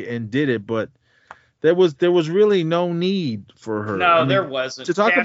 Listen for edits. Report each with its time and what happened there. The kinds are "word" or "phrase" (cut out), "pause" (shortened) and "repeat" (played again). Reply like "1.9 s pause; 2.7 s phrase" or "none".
none